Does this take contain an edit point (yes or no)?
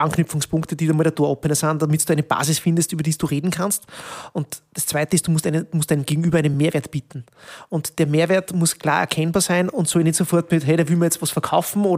no